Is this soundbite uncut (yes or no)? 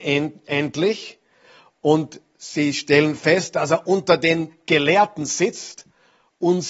yes